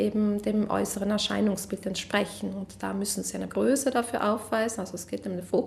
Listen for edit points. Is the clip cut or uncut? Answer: cut